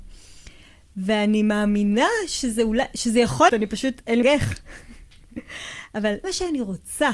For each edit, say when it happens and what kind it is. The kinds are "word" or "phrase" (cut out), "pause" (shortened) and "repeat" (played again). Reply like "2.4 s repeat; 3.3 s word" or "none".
3.5 s word; 4.2 s word; 6.2 s word